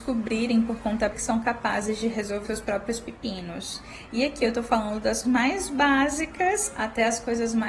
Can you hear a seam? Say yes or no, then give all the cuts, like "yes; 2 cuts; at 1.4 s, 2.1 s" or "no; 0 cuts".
yes; 3 cuts; at 1.1 s, 2.4 s, 5.2 s